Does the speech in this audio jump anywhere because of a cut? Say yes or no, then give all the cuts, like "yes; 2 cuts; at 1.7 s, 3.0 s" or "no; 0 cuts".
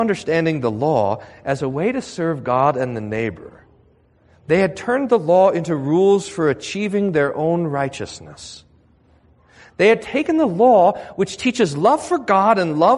no; 0 cuts